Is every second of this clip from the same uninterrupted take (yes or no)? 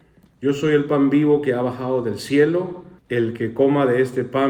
no